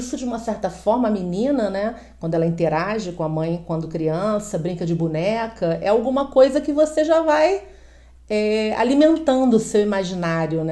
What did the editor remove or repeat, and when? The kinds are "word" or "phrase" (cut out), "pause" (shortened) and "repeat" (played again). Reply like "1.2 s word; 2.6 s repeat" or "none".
none